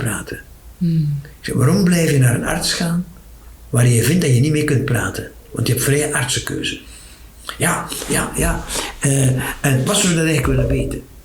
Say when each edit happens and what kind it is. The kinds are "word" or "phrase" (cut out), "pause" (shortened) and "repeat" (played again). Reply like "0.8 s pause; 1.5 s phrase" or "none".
none